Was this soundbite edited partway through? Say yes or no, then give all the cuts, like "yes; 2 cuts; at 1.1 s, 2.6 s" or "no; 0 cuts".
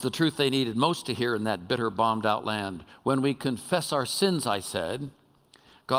no; 0 cuts